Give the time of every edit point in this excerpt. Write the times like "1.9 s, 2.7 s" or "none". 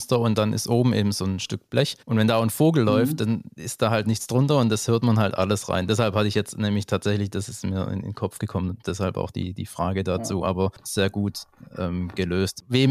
2.0 s